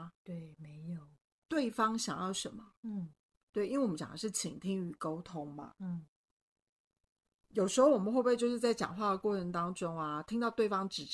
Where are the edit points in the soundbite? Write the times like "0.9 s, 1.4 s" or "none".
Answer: none